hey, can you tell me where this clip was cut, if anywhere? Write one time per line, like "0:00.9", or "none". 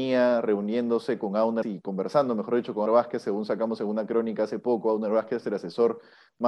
0:01.6
0:02.9

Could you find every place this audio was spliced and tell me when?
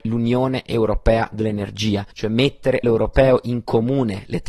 0:02.1
0:02.8

